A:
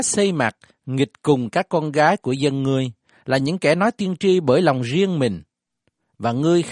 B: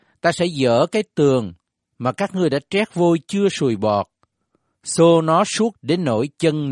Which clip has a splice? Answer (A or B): B